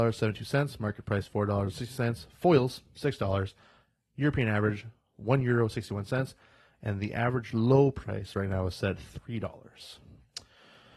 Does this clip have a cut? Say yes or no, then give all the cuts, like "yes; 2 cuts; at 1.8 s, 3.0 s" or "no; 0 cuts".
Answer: no; 0 cuts